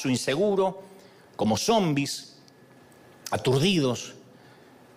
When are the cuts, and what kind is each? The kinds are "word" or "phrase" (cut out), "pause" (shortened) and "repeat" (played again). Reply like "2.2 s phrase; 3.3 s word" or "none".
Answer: none